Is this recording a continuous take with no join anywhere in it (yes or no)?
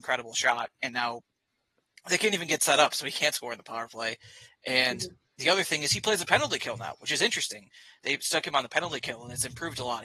yes